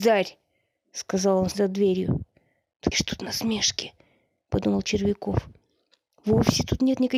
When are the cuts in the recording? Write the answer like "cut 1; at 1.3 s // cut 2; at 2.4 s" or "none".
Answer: cut 1; at 1.5 s // cut 2; at 2.9 s